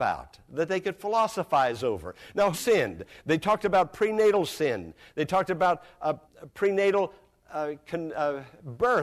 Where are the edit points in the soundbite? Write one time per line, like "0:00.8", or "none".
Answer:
0:02.5
0:06.2